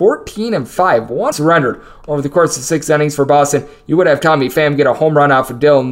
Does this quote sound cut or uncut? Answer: cut